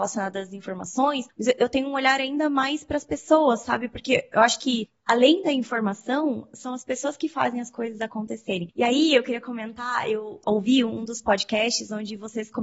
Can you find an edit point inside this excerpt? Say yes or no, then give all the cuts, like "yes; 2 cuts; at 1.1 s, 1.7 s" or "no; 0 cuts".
no; 0 cuts